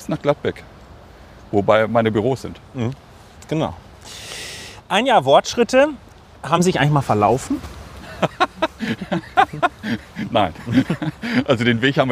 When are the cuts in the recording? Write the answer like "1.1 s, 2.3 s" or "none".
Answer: none